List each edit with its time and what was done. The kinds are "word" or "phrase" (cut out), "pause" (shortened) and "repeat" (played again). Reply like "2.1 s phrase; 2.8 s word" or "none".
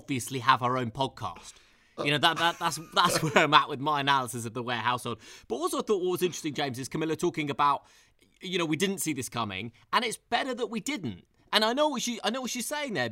2.3 s word